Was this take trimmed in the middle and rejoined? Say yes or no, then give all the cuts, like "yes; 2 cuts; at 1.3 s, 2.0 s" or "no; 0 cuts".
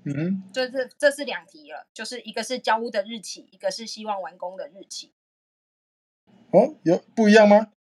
no; 0 cuts